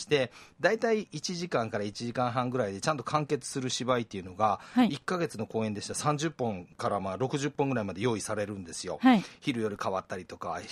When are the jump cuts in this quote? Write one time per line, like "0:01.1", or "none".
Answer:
0:06.7

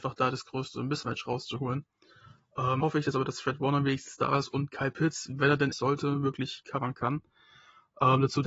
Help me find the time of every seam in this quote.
0:02.8
0:05.7
0:06.6

